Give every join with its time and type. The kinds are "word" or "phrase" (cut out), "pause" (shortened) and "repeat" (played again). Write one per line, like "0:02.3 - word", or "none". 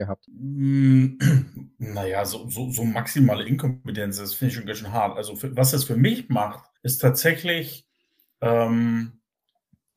0:06.8 - pause